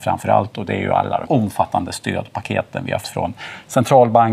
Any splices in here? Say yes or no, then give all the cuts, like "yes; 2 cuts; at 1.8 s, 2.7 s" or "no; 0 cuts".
yes; 2 cuts; at 1.2 s, 3.0 s